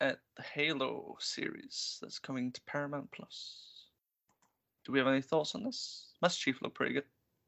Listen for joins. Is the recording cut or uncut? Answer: uncut